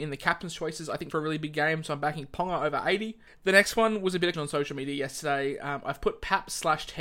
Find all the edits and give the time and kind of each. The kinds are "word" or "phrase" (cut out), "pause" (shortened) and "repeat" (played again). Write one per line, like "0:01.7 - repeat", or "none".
0:01.1 - phrase
0:03.3 - pause
0:04.3 - word